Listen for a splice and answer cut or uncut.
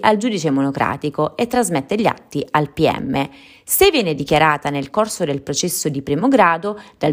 uncut